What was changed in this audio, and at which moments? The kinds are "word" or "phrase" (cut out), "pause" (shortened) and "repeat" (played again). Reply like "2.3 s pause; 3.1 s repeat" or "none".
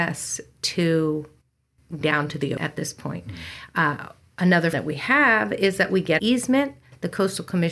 2.0 s word; 2.6 s word; 4.7 s word; 6.2 s word

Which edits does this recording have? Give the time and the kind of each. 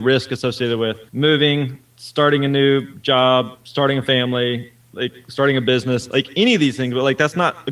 1.1 s pause

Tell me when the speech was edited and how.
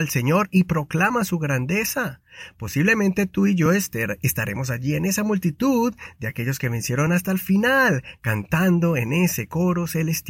none

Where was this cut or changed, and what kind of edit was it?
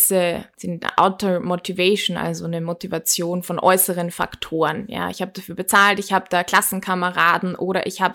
none

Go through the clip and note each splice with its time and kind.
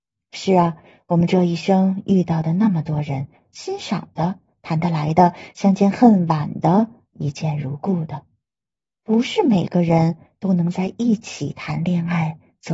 none

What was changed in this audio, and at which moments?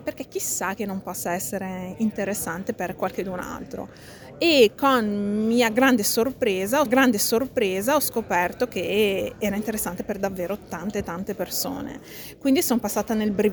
6.9 s repeat

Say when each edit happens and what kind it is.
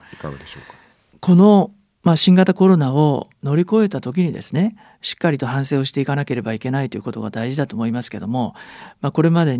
none

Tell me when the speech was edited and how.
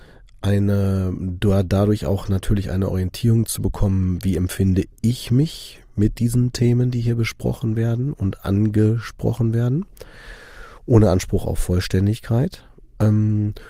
10.8 s pause

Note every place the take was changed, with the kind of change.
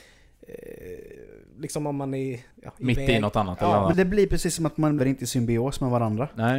2.5 s pause; 3.9 s word; 5.0 s word

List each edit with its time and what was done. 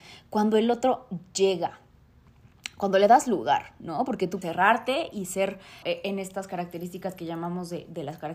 4.4 s word; 5.8 s word

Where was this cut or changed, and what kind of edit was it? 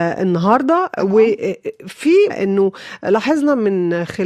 2.3 s word

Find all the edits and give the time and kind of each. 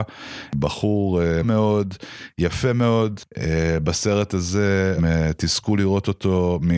1.4 s phrase; 5.0 s word

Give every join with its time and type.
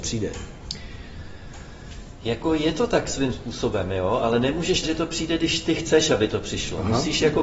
4.8 s word

